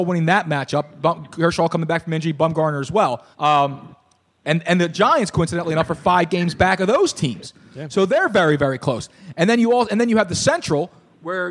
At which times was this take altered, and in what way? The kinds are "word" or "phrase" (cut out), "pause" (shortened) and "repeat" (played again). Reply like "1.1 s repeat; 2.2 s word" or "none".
3.3 s pause